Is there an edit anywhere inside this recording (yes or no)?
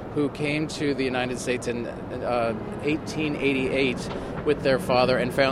no